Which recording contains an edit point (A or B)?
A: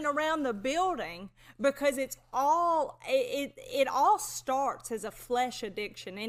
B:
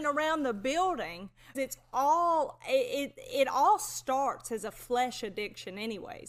B